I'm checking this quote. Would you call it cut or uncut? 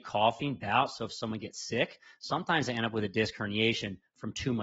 uncut